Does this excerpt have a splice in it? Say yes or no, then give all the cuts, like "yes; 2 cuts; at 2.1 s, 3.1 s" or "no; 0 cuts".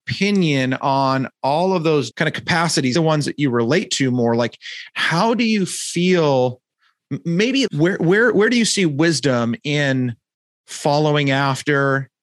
yes; 3 cuts; at 2.1 s, 3.0 s, 7.7 s